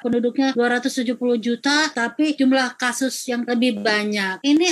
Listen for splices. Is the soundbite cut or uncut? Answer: cut